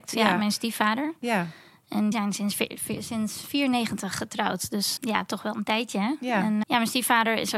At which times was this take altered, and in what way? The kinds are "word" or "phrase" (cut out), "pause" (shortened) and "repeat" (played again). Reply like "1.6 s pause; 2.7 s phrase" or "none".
2.1 s phrase; 5.0 s word; 6.6 s word

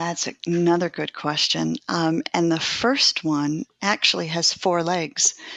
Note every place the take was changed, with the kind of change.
none

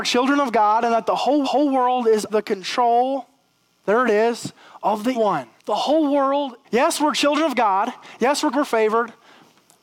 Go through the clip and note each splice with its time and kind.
1.4 s repeat; 2.3 s word; 5.1 s word; 5.6 s pause; 6.6 s pause; 8.5 s word

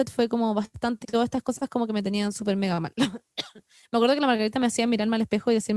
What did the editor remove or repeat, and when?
1.0 s word

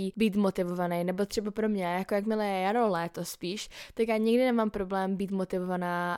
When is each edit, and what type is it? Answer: none

